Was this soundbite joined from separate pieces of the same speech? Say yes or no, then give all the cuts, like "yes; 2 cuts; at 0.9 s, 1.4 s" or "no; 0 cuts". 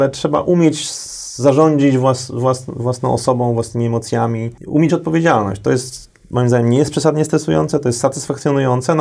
yes; 1 cut; at 4.9 s